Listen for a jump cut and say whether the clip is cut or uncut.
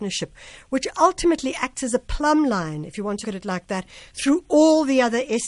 cut